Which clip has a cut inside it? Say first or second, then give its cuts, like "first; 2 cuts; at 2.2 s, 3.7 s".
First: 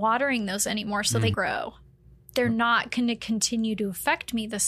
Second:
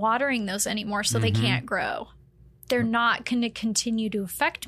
first; 1 cut; at 1.3 s